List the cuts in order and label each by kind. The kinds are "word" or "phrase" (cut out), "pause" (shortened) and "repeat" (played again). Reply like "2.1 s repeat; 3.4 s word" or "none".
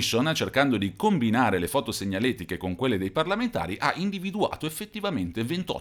none